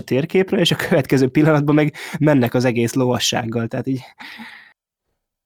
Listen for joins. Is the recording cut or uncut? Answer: uncut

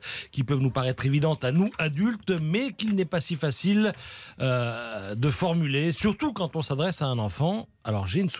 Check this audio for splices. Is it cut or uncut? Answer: uncut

